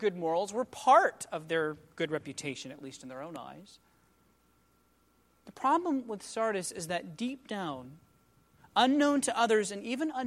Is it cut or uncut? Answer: uncut